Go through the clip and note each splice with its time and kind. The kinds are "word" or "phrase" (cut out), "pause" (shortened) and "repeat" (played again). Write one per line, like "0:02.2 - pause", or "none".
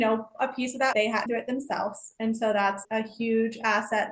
0:00.9 - phrase
0:01.3 - word
0:02.8 - word